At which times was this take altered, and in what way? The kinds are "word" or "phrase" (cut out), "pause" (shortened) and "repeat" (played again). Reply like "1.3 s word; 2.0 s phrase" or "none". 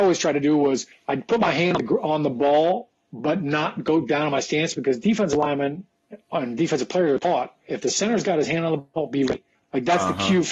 0.9 s pause; 9.5 s pause